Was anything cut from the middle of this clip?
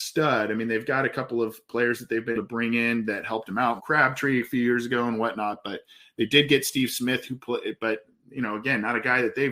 yes; 2 cuts; at 2.3 s, 3.8 s

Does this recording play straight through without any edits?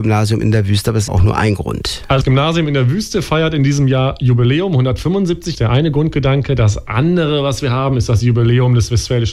no; 3 cuts; at 1.1 s, 2.2 s, 5.5 s

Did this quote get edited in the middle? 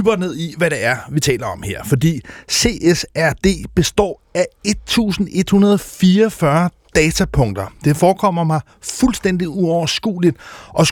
no; 0 cuts

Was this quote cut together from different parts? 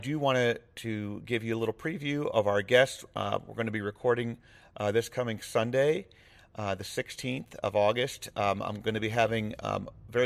no; 0 cuts

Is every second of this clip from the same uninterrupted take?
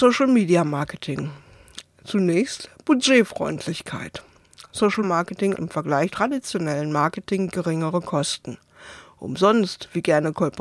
no; 4 cuts; at 5.0 s, 5.5 s, 6.1 s, 7.5 s

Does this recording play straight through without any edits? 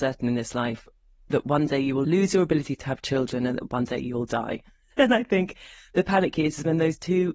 yes; 0 cuts

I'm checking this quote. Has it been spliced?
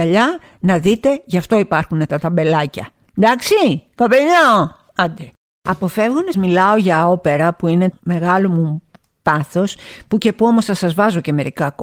yes; 2 cuts; at 6.3 s, 7.9 s

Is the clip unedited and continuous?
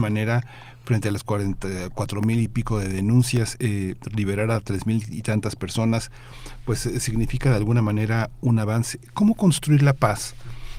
yes; 0 cuts

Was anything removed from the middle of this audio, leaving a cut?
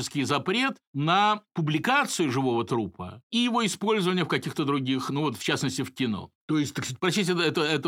no; 0 cuts

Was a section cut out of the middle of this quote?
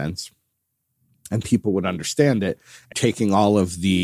yes; 1 cut; at 2.9 s

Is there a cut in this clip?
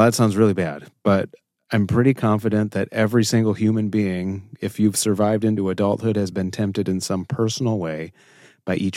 no; 0 cuts

